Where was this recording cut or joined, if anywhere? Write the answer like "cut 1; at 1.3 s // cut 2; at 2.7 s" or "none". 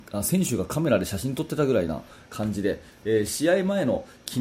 none